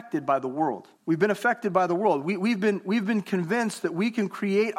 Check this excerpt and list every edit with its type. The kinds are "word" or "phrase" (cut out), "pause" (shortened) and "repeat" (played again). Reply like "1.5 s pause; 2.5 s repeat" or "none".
0.9 s pause